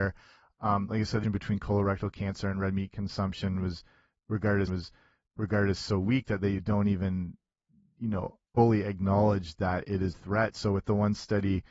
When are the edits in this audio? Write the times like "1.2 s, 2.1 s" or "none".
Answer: 1.2 s, 4.7 s, 6.6 s, 8.5 s, 10.1 s